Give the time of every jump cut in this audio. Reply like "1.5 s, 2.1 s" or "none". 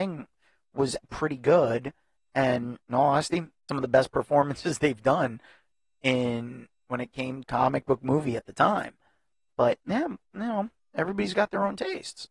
1.0 s, 2.8 s, 3.7 s, 7.4 s